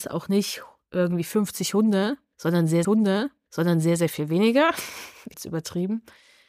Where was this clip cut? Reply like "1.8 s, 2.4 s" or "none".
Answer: 2.8 s, 5.3 s